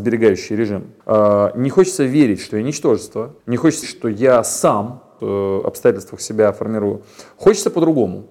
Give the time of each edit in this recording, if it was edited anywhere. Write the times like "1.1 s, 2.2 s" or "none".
1.0 s, 3.4 s, 3.8 s, 5.2 s